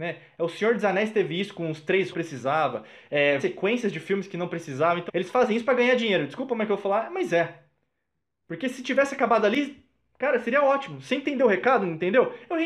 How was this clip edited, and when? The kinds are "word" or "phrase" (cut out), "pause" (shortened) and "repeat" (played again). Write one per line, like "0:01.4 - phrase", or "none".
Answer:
0:02.1 - phrase
0:03.4 - word
0:05.1 - word